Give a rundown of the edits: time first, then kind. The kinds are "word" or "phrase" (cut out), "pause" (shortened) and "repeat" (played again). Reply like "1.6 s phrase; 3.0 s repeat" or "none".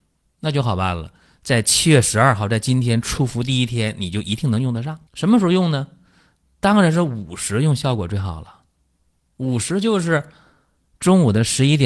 5.1 s pause